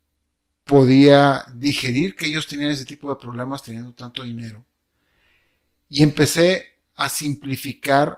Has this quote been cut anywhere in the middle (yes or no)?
no